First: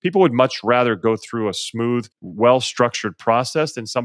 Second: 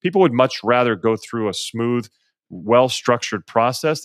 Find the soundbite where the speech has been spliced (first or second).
first